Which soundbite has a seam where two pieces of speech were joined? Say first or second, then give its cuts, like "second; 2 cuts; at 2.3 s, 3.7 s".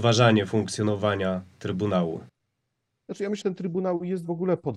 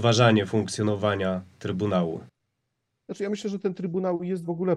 first; 1 cut; at 3.4 s